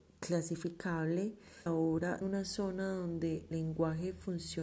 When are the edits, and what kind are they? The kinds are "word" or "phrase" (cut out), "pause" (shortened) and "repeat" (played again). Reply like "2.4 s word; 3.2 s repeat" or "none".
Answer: 1.7 s phrase; 2.2 s phrase; 3.5 s word